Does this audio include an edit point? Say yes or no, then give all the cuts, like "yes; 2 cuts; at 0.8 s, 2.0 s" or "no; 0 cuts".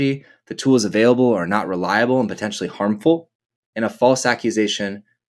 no; 0 cuts